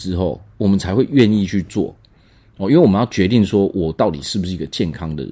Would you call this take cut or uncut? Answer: uncut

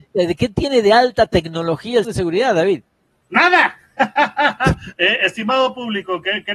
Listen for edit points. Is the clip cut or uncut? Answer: cut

